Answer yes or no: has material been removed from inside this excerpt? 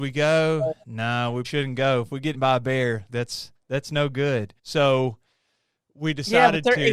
yes